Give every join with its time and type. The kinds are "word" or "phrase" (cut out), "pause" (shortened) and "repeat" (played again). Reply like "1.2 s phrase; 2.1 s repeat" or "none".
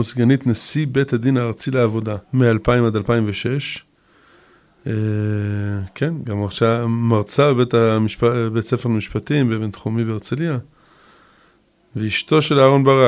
2.2 s pause